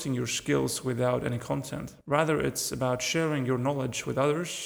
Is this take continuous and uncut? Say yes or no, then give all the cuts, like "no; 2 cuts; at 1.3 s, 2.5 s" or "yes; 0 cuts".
no; 1 cut; at 2.0 s